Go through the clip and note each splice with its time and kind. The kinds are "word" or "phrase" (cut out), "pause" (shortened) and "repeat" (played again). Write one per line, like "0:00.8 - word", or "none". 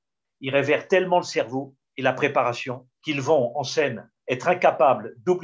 0:01.8 - pause
0:02.9 - pause